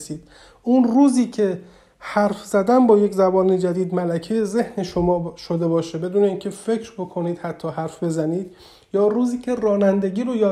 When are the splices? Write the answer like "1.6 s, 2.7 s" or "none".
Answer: none